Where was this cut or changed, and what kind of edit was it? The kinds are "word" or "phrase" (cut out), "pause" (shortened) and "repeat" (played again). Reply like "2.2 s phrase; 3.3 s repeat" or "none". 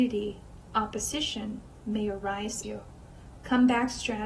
2.6 s word